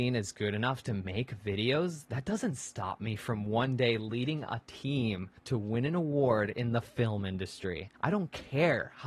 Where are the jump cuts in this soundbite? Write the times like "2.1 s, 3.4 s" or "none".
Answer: 5.4 s, 8.0 s